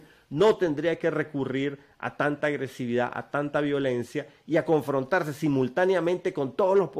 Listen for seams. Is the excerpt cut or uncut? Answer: uncut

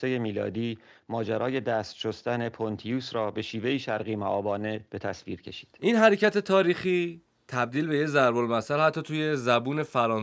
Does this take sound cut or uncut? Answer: uncut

